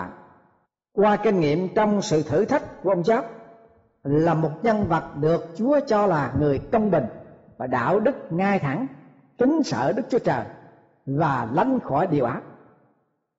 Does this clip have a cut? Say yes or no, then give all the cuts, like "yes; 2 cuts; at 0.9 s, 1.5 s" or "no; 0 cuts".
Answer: no; 0 cuts